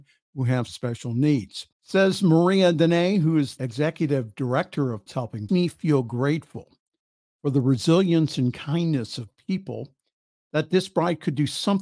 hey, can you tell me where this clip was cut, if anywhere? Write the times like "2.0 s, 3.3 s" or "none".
1.7 s, 3.6 s, 5.1 s, 5.5 s